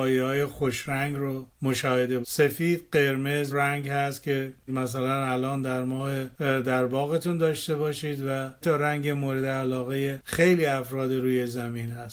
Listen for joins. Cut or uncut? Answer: cut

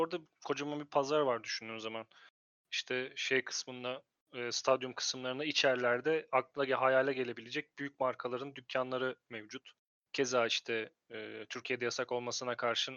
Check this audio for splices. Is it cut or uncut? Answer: cut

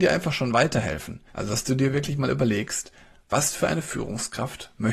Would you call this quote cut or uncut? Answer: cut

